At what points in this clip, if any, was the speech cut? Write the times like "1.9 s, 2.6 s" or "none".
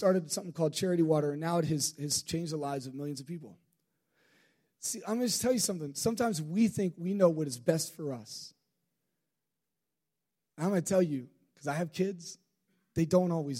none